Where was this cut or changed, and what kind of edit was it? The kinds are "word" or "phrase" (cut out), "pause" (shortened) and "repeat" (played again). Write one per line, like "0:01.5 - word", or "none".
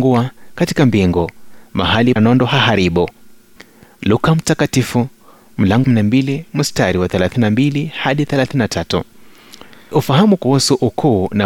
0:02.2 - phrase
0:03.6 - pause
0:05.8 - word
0:06.5 - pause
0:09.9 - word